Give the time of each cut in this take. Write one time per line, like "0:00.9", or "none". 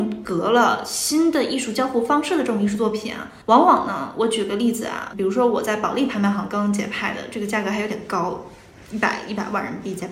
0:03.4
0:05.1